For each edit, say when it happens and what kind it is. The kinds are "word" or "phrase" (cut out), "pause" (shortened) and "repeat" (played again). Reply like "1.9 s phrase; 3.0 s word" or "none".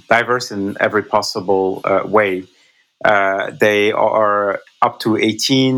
none